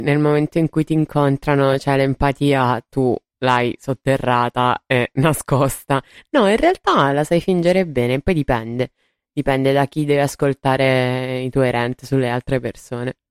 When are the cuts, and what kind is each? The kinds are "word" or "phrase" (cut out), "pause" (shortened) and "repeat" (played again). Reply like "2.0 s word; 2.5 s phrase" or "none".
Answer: none